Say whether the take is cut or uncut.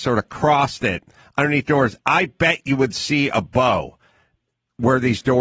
cut